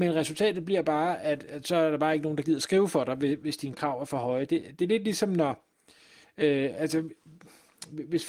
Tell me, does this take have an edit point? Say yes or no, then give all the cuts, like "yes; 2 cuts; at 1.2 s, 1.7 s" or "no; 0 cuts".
no; 0 cuts